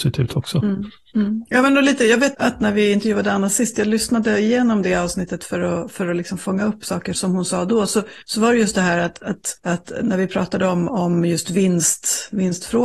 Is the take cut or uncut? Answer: cut